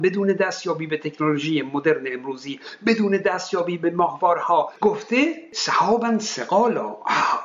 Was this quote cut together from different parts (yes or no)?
no